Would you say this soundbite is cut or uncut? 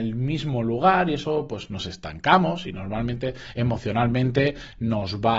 uncut